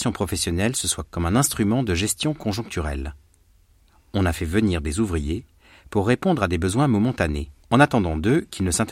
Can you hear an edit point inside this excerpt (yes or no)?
yes